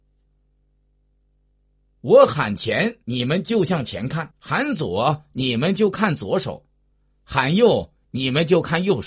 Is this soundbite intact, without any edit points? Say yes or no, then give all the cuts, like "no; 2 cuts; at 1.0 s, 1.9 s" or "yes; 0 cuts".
no; 2 cuts; at 3.0 s, 4.3 s